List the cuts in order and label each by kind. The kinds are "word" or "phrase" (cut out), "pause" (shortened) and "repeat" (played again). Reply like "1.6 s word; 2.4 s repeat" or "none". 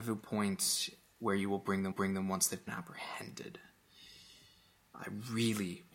1.9 s repeat; 2.7 s phrase